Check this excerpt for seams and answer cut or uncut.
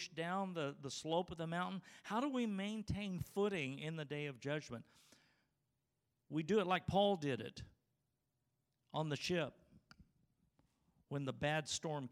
uncut